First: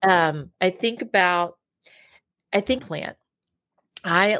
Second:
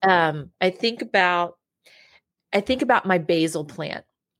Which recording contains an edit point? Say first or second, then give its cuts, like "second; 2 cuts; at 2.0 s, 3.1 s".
first; 1 cut; at 2.8 s